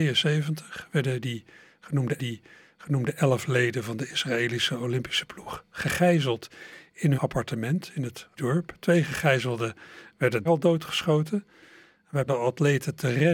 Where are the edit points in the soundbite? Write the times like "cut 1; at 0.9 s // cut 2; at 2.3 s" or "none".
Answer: cut 1; at 2.2 s // cut 2; at 7.1 s // cut 3; at 8.4 s // cut 4; at 10.4 s // cut 5; at 12.3 s